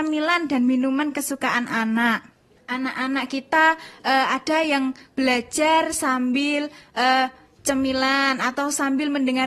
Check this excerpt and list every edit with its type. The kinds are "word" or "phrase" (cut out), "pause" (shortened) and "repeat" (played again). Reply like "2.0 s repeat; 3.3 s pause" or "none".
none